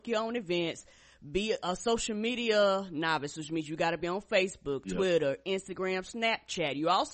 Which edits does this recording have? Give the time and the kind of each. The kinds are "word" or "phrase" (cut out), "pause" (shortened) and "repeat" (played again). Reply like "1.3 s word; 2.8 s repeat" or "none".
none